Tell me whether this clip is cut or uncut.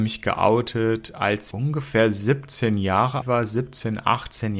cut